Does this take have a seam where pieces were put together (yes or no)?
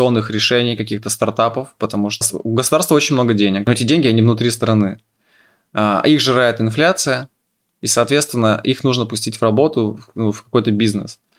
no